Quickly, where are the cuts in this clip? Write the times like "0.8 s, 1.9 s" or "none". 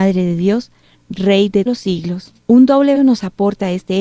1.7 s, 2.4 s, 2.9 s